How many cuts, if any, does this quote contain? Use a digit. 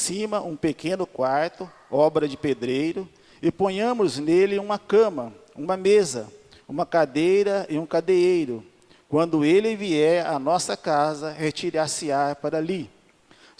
0